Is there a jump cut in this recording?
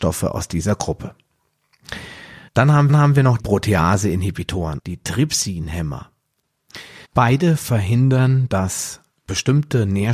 yes; 5 cuts; at 2.5 s, 2.9 s, 3.4 s, 4.8 s, 7.0 s

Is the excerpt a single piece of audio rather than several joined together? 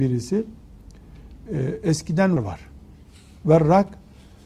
no; 1 cut; at 2.4 s

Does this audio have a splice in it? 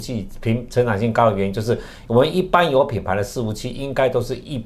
no; 0 cuts

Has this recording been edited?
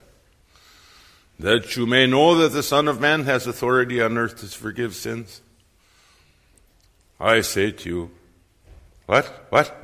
no; 0 cuts

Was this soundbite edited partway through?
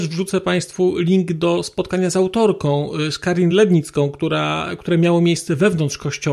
no; 0 cuts

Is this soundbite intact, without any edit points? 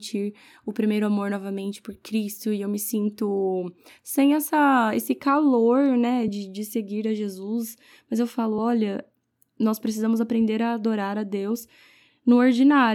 yes; 0 cuts

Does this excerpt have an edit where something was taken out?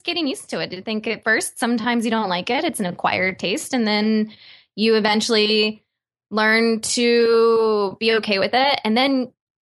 no; 0 cuts

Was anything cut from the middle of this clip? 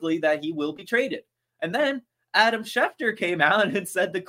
no; 0 cuts

